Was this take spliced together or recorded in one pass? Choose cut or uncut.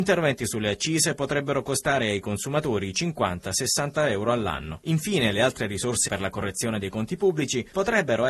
cut